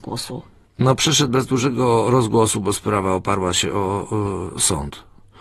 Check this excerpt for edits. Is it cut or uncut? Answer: uncut